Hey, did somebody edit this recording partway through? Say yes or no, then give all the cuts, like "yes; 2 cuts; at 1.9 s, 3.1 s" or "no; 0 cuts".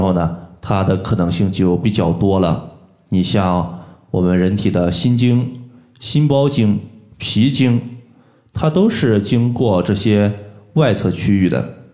no; 0 cuts